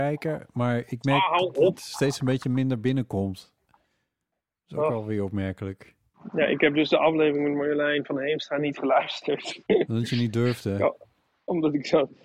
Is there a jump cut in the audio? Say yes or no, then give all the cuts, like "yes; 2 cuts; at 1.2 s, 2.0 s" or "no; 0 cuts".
no; 0 cuts